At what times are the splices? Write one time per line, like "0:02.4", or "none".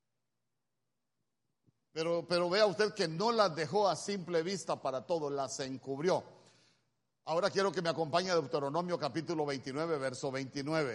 none